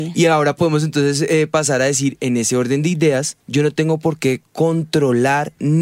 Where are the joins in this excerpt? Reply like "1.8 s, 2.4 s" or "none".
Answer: 3.4 s